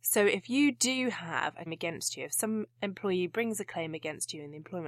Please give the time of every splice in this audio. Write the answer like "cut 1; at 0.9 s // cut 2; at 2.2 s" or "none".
cut 1; at 1.7 s